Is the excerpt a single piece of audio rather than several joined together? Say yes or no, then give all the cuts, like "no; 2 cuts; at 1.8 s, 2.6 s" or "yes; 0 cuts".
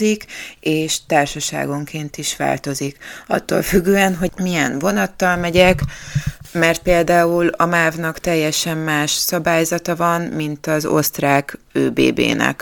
yes; 0 cuts